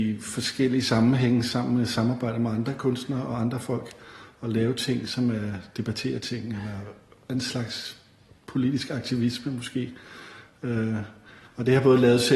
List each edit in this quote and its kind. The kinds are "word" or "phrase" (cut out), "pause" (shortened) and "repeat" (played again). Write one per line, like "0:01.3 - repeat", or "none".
none